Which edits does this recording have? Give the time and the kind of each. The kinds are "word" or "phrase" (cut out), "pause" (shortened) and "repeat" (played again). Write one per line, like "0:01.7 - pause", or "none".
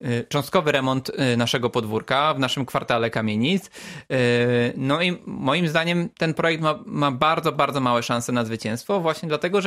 none